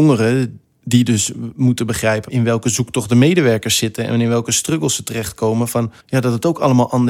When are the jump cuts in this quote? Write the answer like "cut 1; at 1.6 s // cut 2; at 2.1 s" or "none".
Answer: cut 1; at 6.0 s

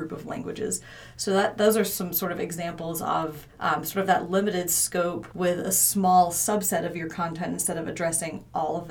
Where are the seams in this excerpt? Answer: cut 1; at 3.5 s // cut 2; at 5.3 s

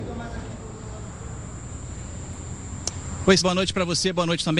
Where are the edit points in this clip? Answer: cut 1; at 3.4 s

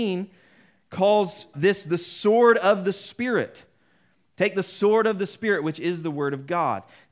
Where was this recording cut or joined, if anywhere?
cut 1; at 1.5 s

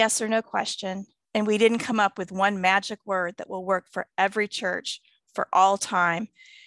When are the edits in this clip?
none

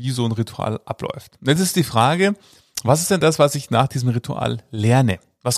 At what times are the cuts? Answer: none

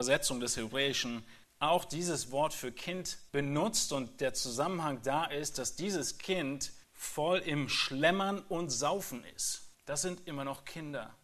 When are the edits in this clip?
cut 1; at 1.4 s // cut 2; at 3.3 s // cut 3; at 6.8 s // cut 4; at 9.7 s

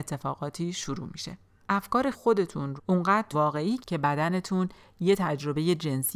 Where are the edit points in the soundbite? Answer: cut 1; at 1.6 s // cut 2; at 2.1 s // cut 3; at 2.8 s // cut 4; at 3.3 s // cut 5; at 3.8 s

